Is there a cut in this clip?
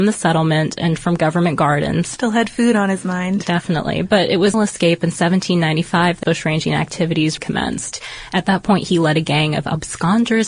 yes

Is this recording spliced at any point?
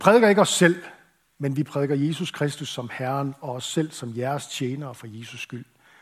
no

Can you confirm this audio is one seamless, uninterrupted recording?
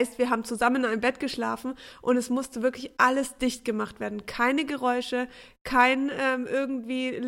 yes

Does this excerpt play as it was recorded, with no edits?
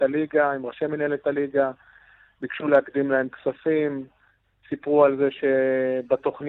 yes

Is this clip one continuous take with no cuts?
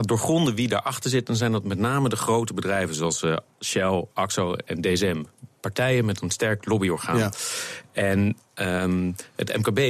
yes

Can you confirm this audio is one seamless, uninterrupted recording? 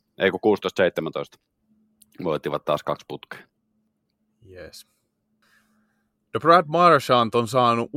yes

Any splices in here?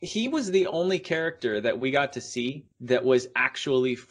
yes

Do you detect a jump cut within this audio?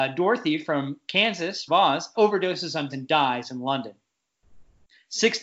yes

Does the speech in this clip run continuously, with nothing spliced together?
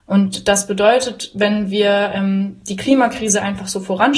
yes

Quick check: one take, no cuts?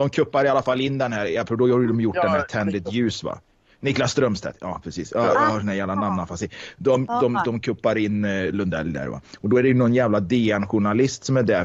yes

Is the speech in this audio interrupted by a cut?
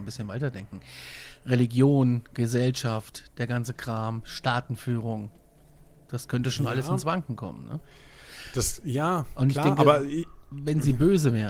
no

